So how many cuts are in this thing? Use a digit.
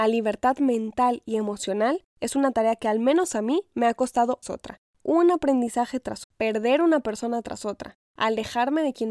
2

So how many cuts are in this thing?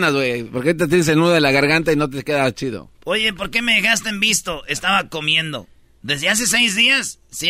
1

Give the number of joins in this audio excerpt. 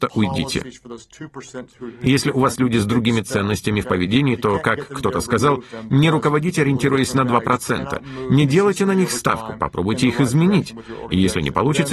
1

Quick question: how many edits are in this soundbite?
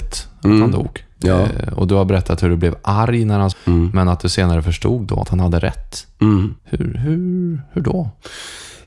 3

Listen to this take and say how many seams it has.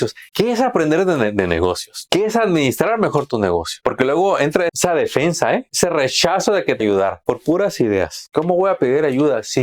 2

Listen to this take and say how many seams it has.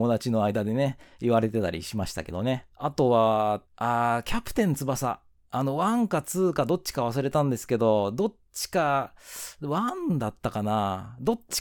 3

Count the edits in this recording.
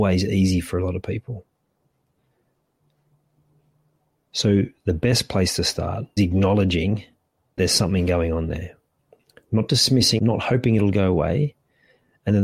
3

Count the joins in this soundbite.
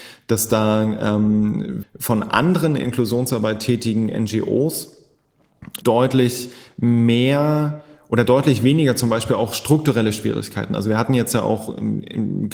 3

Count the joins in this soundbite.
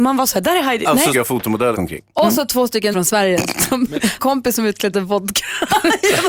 5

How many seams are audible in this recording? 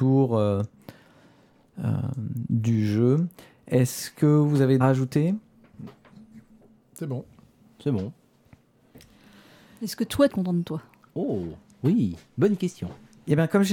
2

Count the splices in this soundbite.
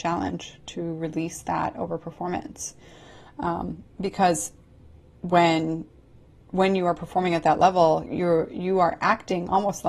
1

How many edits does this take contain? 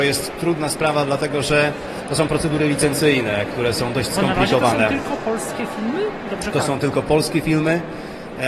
1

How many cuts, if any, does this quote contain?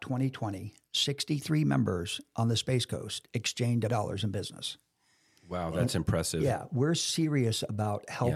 1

